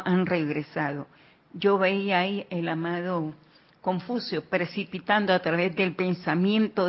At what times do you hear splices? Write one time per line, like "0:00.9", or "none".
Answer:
none